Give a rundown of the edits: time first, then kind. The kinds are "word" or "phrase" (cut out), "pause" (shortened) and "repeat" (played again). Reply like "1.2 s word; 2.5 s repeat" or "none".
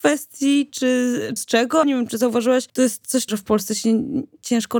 1.4 s word; 1.8 s word; 2.7 s pause; 3.3 s word

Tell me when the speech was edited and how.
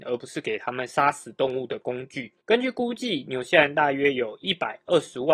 2.4 s pause

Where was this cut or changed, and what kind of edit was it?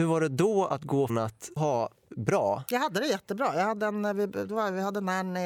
1.1 s word; 1.6 s word; 2.1 s word

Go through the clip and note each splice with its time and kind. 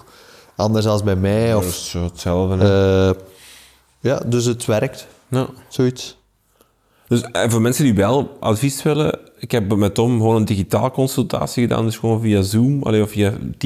none

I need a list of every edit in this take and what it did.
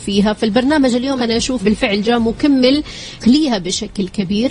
1.2 s word; 1.6 s word; 3.2 s phrase

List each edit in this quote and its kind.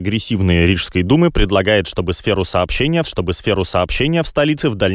3.0 s repeat

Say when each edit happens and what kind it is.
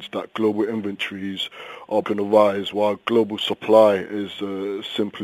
2.0 s word

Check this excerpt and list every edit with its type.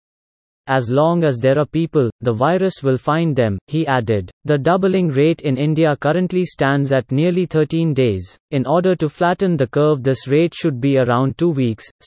4.3 s pause; 8.4 s pause

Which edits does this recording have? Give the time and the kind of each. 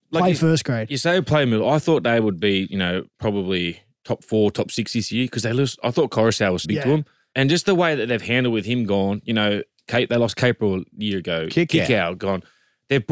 6.6 s word

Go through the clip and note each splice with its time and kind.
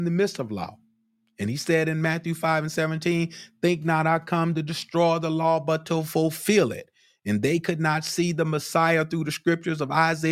none

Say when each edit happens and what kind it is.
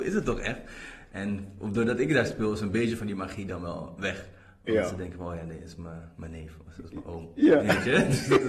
none

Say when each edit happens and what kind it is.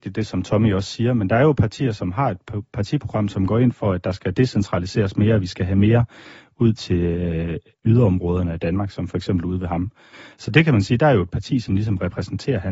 none

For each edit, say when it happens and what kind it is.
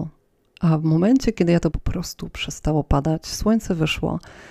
1.7 s word

